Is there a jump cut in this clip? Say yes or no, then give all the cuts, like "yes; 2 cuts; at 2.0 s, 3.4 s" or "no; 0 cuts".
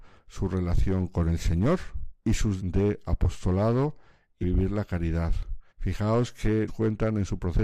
yes; 5 cuts; at 2.2 s, 2.6 s, 4.4 s, 5.7 s, 6.7 s